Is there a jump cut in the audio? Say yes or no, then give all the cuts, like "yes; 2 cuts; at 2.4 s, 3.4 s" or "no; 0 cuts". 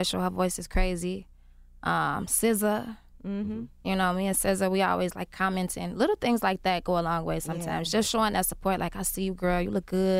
no; 0 cuts